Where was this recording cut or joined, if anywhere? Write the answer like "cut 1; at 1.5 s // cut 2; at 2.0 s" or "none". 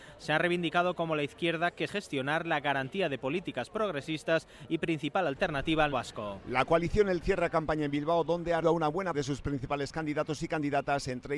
cut 1; at 1.9 s // cut 2; at 5.9 s // cut 3; at 7.2 s // cut 4; at 8.6 s // cut 5; at 9.1 s